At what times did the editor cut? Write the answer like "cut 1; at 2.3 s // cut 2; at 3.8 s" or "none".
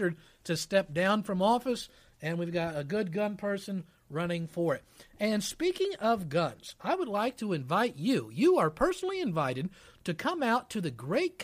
none